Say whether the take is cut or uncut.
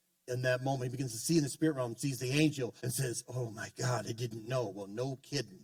cut